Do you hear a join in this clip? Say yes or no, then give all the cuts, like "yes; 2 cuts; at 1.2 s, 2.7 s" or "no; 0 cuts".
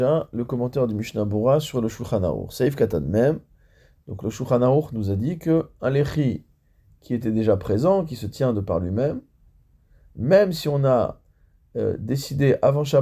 no; 0 cuts